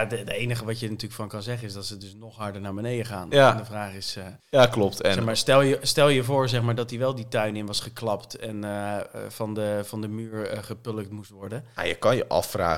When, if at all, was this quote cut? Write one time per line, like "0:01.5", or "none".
0:04.4